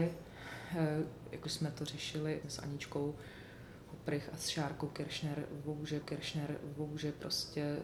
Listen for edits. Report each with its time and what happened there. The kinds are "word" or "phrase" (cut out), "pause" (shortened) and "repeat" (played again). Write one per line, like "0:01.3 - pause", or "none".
0:01.4 - phrase
0:02.4 - word
0:06.0 - repeat